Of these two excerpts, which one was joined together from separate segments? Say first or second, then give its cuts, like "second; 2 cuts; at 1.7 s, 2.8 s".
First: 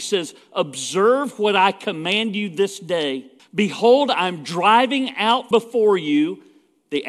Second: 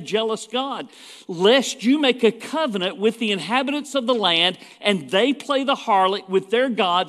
first; 2 cuts; at 3.4 s, 5.5 s